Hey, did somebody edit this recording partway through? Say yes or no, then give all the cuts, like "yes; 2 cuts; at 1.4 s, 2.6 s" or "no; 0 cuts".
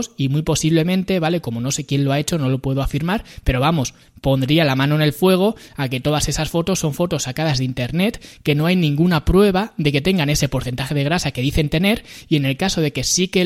no; 0 cuts